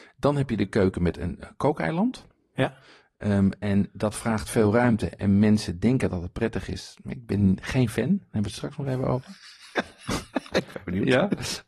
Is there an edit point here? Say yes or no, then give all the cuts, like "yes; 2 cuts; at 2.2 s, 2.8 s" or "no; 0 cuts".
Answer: no; 0 cuts